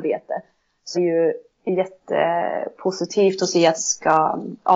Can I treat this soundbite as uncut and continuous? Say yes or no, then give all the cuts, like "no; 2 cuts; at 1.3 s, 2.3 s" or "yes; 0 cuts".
no; 2 cuts; at 0.9 s, 3.8 s